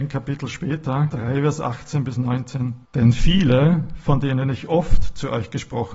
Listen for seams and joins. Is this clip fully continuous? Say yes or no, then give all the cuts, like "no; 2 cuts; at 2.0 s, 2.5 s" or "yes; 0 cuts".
no; 2 cuts; at 1.1 s, 2.8 s